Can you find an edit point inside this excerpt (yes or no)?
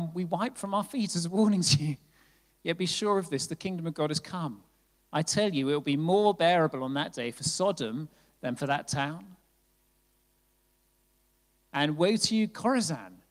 no